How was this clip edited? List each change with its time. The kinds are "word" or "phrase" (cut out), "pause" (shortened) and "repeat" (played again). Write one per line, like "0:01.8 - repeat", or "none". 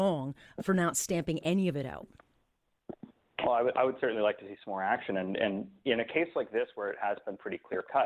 none